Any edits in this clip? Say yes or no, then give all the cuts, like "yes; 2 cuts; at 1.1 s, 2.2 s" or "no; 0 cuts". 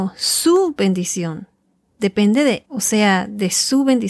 yes; 1 cut; at 2.6 s